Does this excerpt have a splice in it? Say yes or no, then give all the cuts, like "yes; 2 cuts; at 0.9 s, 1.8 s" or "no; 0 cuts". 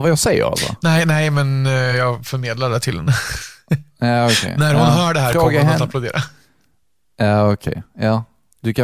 no; 0 cuts